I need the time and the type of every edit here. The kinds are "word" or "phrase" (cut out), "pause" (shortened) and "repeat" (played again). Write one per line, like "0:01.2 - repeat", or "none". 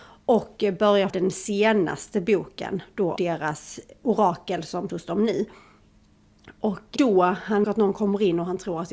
0:01.1 - word
0:03.2 - word
0:04.9 - word
0:07.0 - word
0:07.6 - word